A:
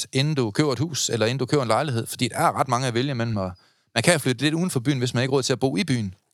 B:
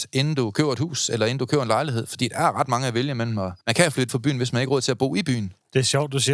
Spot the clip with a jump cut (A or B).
B